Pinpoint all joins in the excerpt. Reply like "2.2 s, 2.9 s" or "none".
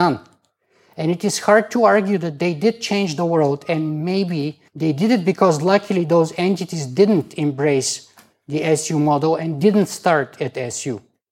4.7 s

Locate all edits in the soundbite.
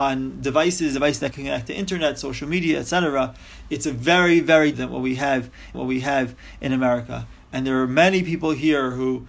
1.3 s, 4.7 s, 5.7 s

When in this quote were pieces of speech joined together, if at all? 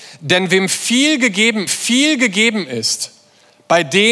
1.7 s

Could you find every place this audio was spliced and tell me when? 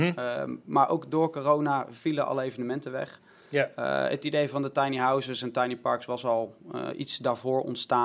none

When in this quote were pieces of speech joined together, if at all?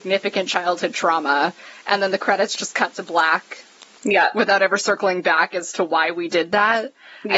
6.3 s

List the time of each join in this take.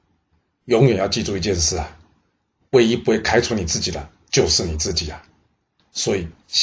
none

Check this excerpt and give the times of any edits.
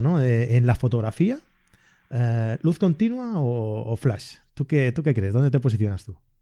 none

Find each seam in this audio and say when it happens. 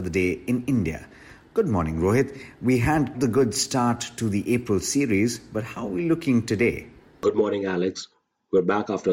3.1 s

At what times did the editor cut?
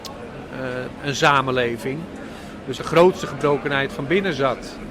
2.8 s

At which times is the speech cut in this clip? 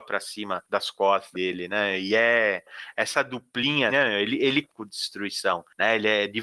1.3 s, 3.9 s, 4.6 s

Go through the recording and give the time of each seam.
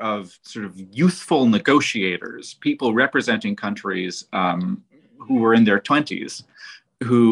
none

